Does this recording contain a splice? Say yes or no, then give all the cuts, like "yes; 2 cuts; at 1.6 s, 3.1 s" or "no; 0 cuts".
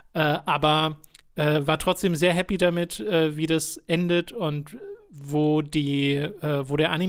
no; 0 cuts